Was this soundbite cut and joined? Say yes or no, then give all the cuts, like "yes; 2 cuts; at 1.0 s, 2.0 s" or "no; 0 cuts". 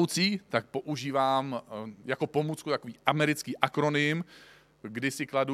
no; 0 cuts